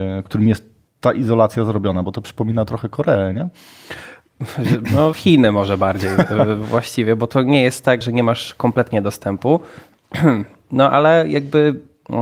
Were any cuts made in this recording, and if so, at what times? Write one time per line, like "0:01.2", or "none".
0:05.1
0:08.0